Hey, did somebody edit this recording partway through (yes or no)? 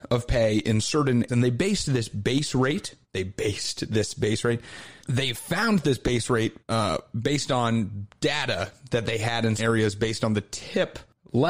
yes